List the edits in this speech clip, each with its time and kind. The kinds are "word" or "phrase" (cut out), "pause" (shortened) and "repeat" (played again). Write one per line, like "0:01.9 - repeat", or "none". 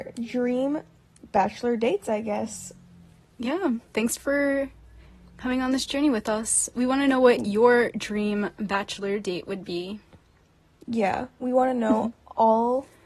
0:03.9 - pause